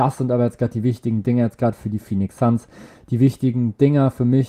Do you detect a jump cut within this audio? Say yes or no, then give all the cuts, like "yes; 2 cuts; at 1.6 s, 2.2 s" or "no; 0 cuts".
no; 0 cuts